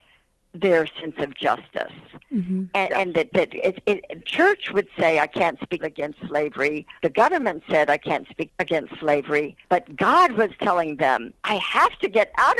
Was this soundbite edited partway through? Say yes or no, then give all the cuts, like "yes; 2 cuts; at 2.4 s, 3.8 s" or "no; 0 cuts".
yes; 7 cuts; at 3.3 s, 4.2 s, 5.8 s, 7.0 s, 8.5 s, 9.6 s, 11.4 s